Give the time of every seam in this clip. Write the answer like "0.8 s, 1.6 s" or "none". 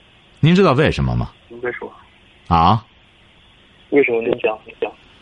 1.4 s